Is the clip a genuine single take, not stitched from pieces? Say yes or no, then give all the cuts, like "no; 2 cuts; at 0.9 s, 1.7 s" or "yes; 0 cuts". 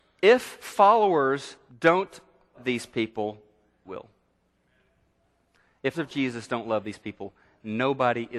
no; 4 cuts; at 1.7 s, 2.5 s, 3.8 s, 5.9 s